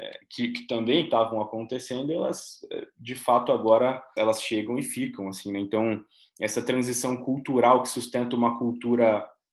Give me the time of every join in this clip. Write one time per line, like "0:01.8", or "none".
none